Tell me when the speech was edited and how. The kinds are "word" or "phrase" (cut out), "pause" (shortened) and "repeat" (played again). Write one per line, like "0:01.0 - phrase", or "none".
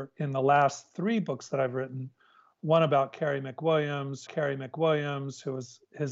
0:04.3 - repeat